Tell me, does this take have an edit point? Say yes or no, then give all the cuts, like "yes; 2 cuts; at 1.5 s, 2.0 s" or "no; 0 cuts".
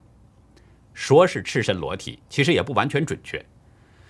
yes; 1 cut; at 2.2 s